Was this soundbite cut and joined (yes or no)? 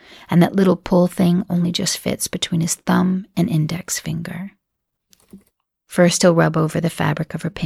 no